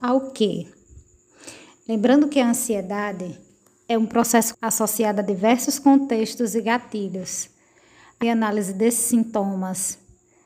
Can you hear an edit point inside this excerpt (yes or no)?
yes